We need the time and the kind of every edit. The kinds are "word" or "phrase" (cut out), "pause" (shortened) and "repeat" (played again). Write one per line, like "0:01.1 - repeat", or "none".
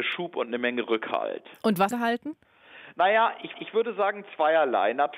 0:01.9 - phrase
0:03.5 - repeat

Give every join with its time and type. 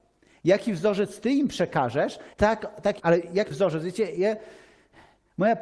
0:02.3 - pause
0:03.0 - word
0:03.5 - word

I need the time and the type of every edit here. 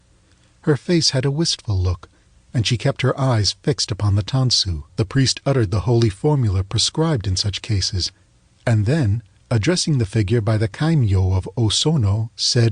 0:04.9 - pause

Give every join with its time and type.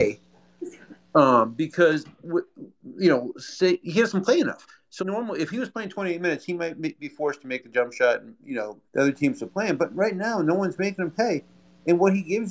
0:05.0 - word
0:08.9 - pause

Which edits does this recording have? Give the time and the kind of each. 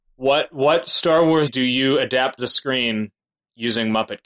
0:01.5 - word
0:02.4 - word

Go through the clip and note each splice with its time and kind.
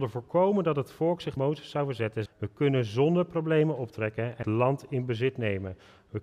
0:01.4 - word
0:02.3 - word
0:04.4 - word

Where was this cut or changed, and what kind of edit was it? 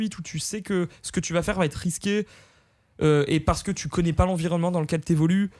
none

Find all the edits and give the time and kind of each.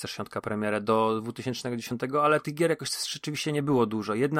none

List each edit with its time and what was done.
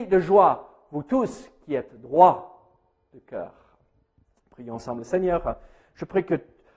none

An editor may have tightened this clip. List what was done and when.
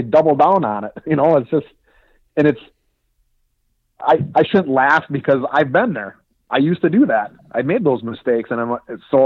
none

